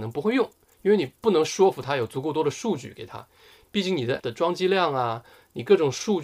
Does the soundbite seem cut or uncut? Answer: cut